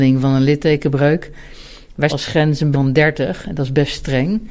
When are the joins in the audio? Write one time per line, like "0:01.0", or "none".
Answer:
0:02.1
0:02.7

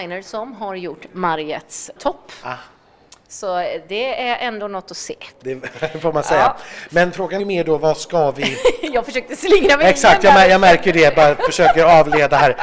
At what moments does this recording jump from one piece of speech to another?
0:02.0
0:07.4

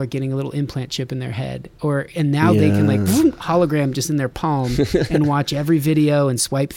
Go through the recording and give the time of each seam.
none

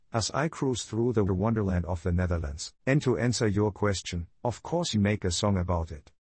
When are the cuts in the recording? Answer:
0:01.3
0:02.8
0:04.9

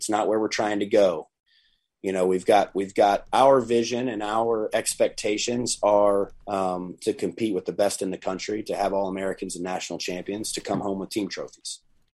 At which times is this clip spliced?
0:06.4

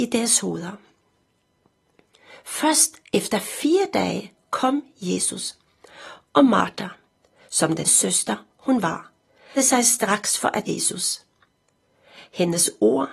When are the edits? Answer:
0:07.8
0:09.6
0:10.6

